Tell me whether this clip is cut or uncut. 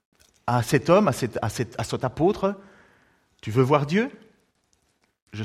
uncut